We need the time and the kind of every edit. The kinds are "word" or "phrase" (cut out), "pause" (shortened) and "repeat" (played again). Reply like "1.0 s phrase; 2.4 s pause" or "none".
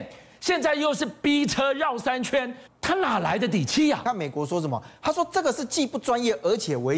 2.7 s pause